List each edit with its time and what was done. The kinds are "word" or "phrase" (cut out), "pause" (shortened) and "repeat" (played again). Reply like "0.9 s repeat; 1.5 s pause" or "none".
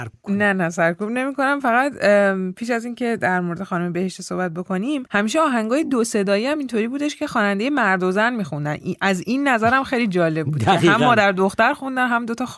none